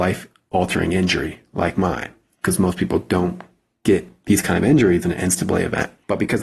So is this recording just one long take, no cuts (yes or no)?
yes